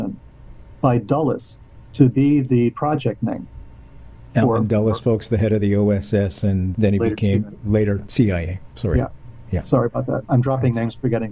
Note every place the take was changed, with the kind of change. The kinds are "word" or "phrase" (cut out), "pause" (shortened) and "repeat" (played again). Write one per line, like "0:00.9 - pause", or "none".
0:04.3 - pause
0:06.7 - word